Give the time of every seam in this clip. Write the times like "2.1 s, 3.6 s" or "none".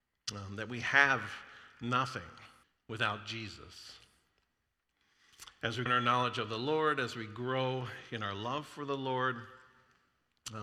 2.6 s, 5.9 s